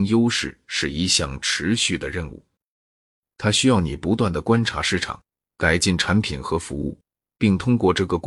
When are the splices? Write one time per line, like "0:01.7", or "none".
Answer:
0:05.4